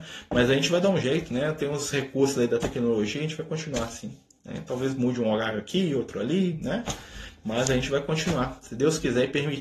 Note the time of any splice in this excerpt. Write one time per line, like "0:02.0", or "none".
none